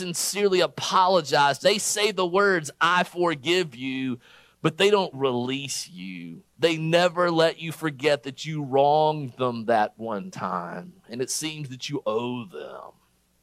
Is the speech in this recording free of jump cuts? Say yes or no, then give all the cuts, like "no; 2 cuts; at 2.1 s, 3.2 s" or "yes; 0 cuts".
no; 4 cuts; at 1.6 s, 5.1 s, 6.5 s, 12.0 s